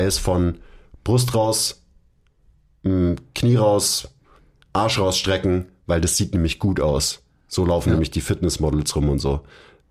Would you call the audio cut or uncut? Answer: uncut